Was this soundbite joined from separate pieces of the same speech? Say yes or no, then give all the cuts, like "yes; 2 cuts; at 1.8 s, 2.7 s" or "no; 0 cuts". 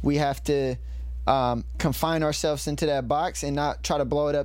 no; 0 cuts